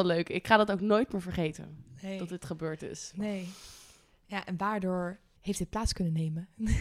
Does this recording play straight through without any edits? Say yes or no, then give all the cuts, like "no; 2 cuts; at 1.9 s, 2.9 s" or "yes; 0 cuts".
no; 1 cut; at 5.4 s